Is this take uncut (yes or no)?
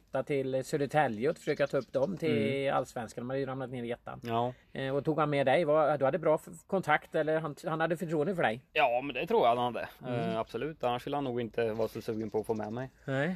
no